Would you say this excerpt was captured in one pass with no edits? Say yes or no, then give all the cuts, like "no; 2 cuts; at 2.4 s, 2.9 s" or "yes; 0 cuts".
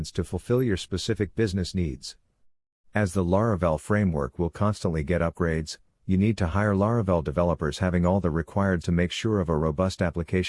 no; 1 cut; at 8.8 s